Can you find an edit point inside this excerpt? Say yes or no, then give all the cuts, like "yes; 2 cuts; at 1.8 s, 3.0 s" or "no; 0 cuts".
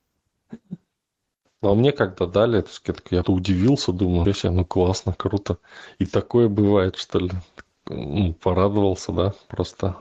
yes; 2 cuts; at 3.2 s, 4.2 s